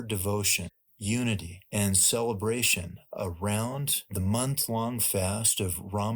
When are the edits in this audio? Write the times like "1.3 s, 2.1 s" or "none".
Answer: none